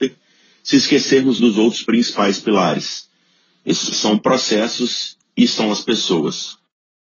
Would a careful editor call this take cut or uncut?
cut